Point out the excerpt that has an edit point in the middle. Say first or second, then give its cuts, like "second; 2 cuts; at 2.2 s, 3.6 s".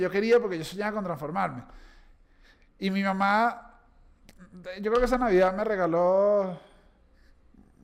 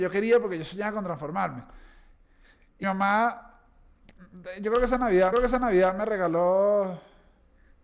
second; 2 cuts; at 2.8 s, 5.3 s